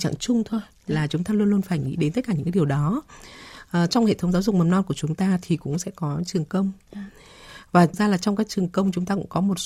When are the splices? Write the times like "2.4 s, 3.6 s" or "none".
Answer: 7.9 s